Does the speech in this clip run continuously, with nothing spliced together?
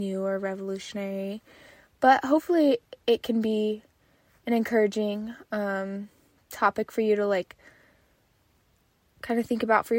yes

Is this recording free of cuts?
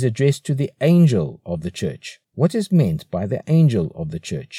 no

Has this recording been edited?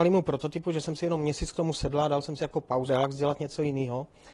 yes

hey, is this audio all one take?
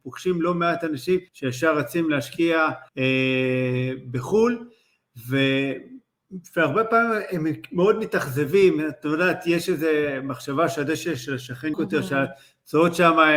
no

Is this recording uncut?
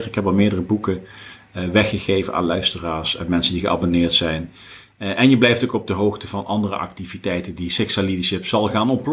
yes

